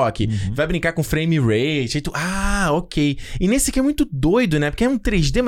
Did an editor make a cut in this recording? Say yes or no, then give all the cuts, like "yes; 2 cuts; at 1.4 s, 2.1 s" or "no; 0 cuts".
no; 0 cuts